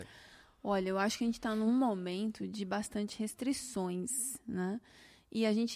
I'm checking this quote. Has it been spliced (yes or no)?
no